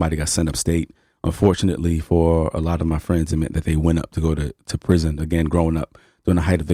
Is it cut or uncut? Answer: uncut